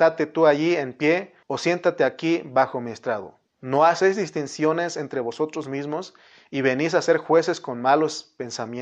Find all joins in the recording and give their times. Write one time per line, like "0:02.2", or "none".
0:01.4
0:03.5